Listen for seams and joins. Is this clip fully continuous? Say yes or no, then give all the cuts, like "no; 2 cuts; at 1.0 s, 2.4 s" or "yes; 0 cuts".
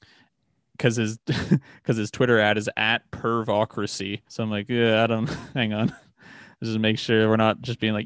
no; 1 cut; at 4.3 s